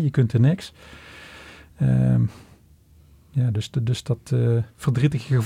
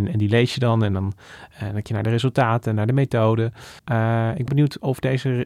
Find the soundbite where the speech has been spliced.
second; 3 cuts; at 1.8 s, 3.8 s, 4.5 s

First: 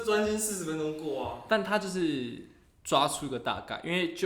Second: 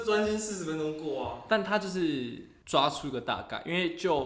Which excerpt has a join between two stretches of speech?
second; 1 cut; at 2.6 s

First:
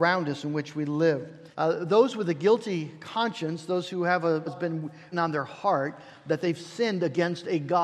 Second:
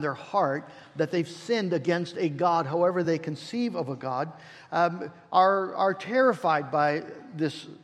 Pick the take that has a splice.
first; 3 cuts; at 1.5 s, 4.5 s, 5.1 s

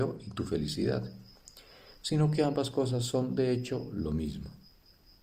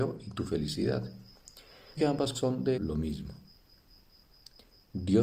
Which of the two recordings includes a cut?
second; 3 cuts; at 2.0 s, 2.3 s, 2.7 s

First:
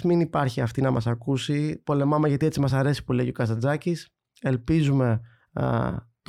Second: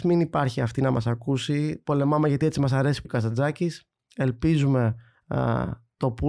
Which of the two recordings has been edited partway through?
second; 1 cut; at 3.0 s

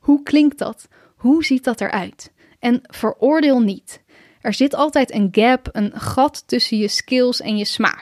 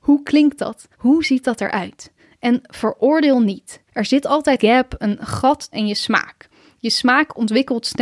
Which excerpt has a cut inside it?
second; 4 cuts; at 0.9 s, 3.9 s, 4.6 s, 5.7 s

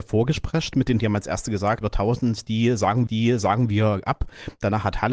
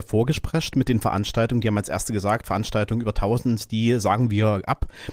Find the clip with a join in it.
first; 3 cuts; at 1.0 s, 1.8 s, 3.1 s

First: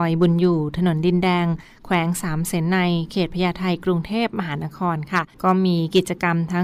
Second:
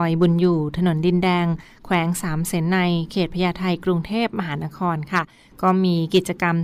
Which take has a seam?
first; 1 cut; at 5.3 s

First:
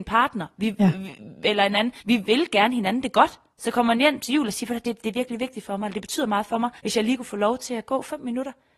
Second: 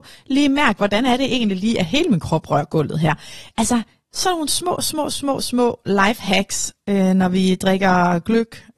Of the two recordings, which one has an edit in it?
first; 2 cuts; at 2.0 s, 6.8 s

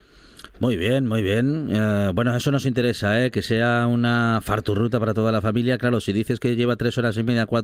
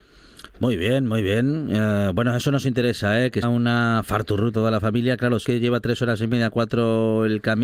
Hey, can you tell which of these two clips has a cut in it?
second; 3 cuts; at 3.4 s, 4.5 s, 5.4 s

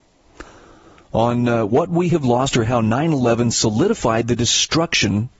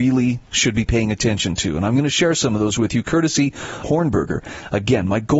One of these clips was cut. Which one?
second; 1 cut; at 3.8 s

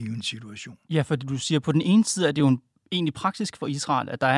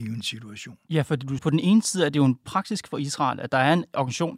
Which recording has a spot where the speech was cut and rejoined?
second; 2 cuts; at 1.4 s, 2.4 s

